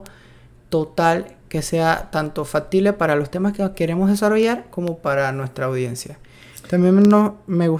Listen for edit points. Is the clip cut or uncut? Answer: uncut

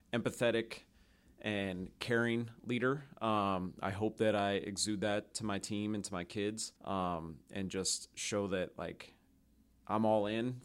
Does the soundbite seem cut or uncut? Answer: cut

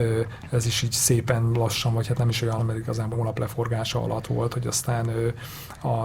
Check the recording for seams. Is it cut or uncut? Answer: cut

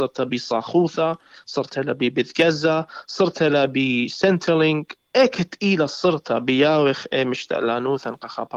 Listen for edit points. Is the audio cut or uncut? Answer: uncut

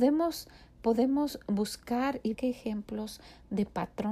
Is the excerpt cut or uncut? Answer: cut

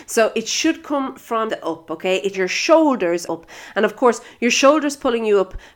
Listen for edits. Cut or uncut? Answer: cut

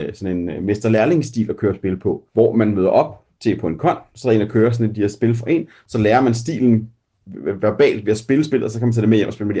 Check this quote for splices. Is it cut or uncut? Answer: cut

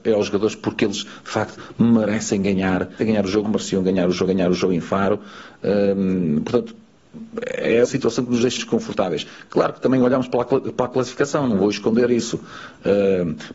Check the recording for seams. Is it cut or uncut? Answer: cut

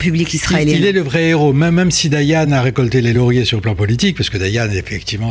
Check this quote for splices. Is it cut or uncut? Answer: uncut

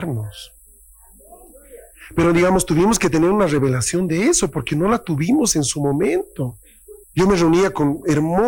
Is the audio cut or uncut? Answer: cut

